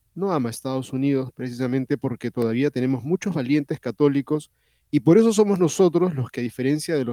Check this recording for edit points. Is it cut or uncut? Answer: uncut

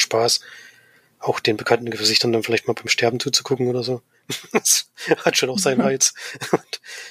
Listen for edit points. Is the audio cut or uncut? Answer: uncut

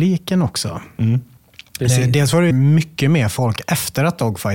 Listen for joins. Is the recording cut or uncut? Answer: cut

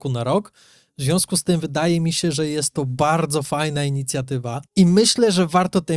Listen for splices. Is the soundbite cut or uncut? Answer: cut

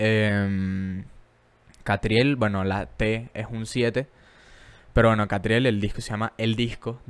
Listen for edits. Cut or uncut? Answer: uncut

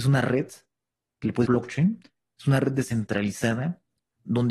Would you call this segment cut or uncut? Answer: cut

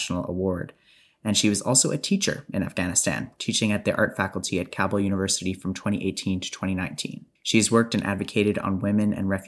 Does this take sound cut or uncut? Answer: cut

